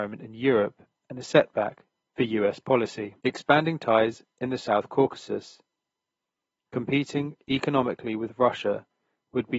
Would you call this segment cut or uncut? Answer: cut